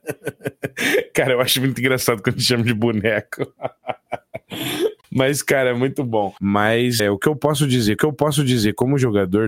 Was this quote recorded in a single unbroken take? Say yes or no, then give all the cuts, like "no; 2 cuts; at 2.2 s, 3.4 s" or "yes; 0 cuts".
no; 2 cuts; at 7.0 s, 8.0 s